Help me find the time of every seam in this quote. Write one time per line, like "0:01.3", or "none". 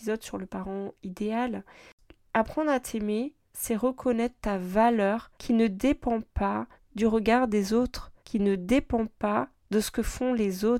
0:03.4
0:05.3
0:06.7
0:08.2